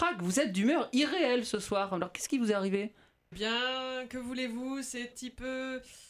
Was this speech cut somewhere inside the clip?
yes; 2 cuts; at 3.3 s, 5.1 s

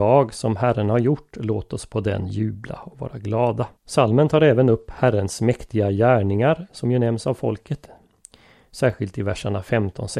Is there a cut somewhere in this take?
yes; 1 cut; at 3.8 s

